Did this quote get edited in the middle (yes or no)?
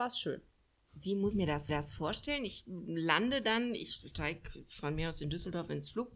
yes